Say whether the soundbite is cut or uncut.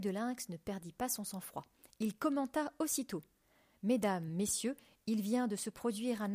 uncut